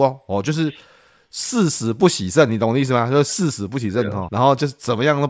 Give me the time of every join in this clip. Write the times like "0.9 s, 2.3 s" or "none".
4.3 s